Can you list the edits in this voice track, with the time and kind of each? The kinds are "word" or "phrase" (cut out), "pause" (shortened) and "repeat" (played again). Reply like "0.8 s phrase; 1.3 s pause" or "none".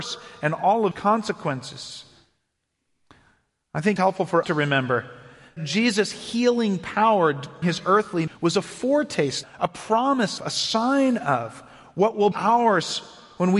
0.9 s word; 4.0 s word; 4.4 s word; 5.6 s word; 7.6 s word; 8.3 s word; 9.4 s word; 10.4 s word; 12.3 s word